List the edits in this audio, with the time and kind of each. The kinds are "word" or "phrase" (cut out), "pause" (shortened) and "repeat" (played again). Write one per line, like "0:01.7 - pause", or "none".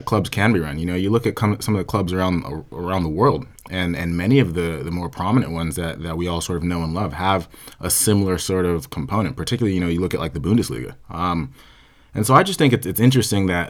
none